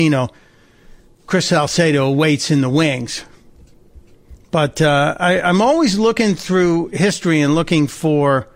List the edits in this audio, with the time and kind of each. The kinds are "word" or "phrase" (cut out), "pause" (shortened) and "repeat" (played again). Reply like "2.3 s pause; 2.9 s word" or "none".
1.0 s pause